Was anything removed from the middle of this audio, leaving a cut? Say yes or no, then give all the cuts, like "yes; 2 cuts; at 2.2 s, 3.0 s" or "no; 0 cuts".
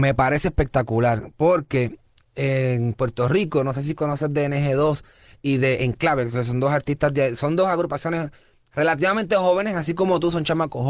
no; 0 cuts